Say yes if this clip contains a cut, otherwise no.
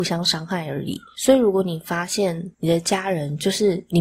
yes